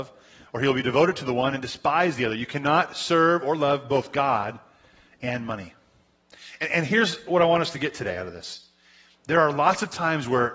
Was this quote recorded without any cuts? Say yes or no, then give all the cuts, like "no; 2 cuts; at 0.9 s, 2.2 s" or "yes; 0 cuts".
yes; 0 cuts